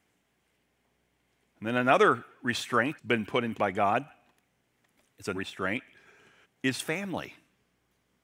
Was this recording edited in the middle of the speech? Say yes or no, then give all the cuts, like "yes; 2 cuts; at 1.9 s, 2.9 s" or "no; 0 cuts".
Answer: yes; 4 cuts; at 3.0 s, 3.5 s, 5.3 s, 6.4 s